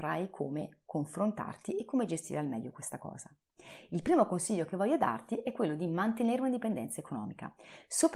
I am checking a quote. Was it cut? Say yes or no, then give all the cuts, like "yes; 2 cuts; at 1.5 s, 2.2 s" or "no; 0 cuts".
no; 0 cuts